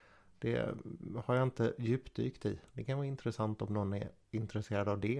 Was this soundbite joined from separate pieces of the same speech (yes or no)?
no